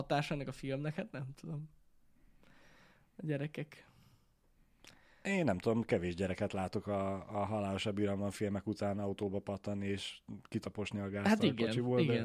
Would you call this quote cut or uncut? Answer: uncut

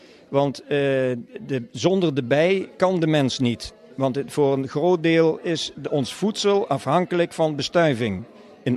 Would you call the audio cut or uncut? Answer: uncut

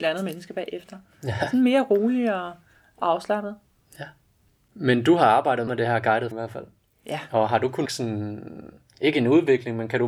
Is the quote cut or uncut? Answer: cut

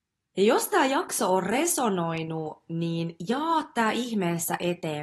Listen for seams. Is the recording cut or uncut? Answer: uncut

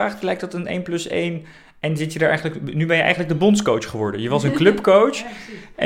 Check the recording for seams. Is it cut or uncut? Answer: uncut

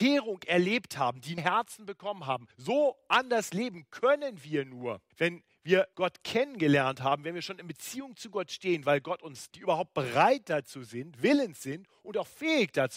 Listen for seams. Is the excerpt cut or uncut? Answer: cut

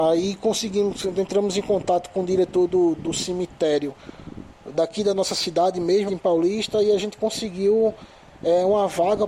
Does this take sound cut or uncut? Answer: cut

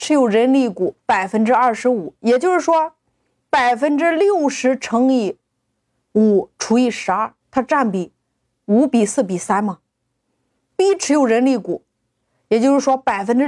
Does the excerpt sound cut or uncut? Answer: cut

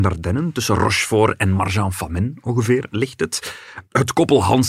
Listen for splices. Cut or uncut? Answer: uncut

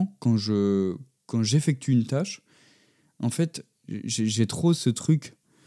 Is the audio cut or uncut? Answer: uncut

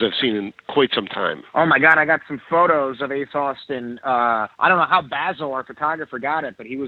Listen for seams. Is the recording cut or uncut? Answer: cut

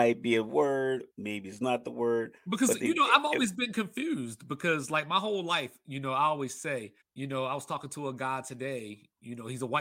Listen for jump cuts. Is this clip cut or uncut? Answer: cut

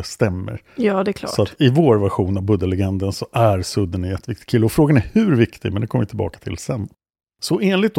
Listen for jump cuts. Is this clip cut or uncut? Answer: uncut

